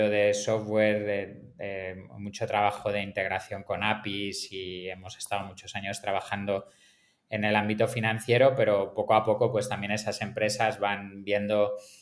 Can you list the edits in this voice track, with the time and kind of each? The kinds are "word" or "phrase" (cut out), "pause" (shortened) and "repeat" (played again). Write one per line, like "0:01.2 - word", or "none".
none